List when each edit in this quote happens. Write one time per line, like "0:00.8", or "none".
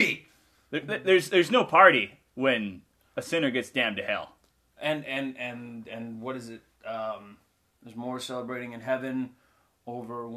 none